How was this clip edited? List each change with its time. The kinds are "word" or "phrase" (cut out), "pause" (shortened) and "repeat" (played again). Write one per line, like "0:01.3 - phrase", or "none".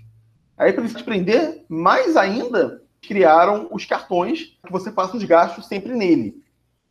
0:00.9 - word
0:03.0 - word
0:04.6 - word